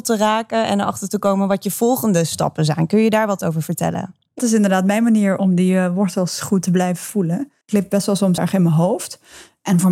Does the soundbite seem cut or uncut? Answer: cut